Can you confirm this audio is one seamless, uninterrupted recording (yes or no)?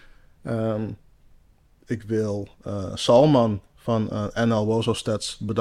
yes